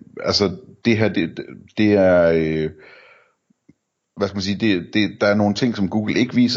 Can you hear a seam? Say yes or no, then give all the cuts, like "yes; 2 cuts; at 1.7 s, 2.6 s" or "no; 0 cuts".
no; 0 cuts